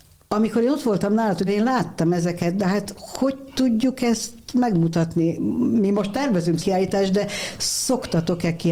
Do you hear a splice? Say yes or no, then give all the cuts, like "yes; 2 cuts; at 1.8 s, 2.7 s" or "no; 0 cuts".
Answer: yes; 2 cuts; at 1.5 s, 6.6 s